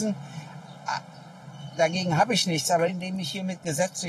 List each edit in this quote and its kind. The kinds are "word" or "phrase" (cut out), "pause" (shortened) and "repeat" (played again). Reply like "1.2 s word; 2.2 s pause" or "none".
2.9 s word